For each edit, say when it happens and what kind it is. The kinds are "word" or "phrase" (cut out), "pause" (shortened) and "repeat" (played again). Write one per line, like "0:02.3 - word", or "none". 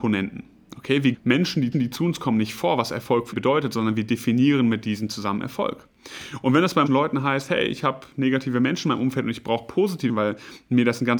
0:01.1 - word
0:01.7 - repeat
0:03.3 - word
0:06.9 - word
0:10.1 - word